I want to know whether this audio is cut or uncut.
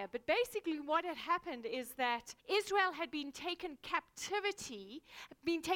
cut